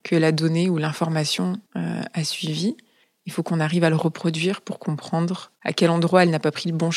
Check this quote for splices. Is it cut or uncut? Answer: cut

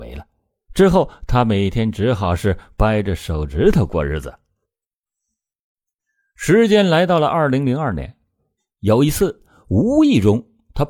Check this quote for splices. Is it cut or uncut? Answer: uncut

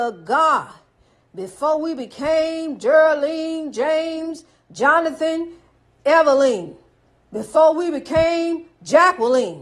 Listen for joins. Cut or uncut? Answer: uncut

